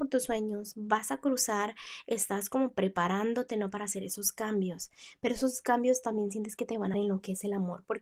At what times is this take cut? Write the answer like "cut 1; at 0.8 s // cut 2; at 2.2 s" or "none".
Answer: cut 1; at 6.9 s